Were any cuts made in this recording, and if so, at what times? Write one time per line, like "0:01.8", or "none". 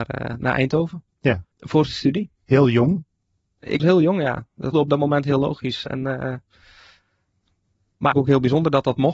0:01.5
0:03.8
0:04.7
0:08.1